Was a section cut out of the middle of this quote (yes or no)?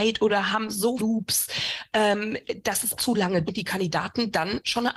yes